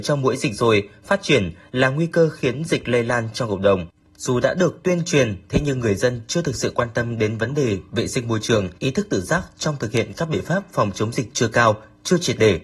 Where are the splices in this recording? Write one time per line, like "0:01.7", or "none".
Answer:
0:08.8